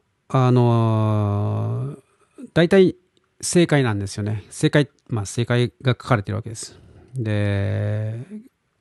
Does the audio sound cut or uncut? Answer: uncut